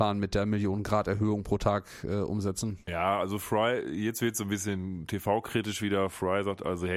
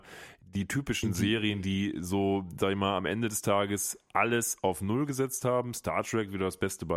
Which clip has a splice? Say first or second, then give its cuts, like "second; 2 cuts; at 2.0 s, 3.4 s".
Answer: first; 1 cut; at 2.8 s